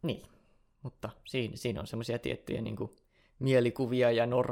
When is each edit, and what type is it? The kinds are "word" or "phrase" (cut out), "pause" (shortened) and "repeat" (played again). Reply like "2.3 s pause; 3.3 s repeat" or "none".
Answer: none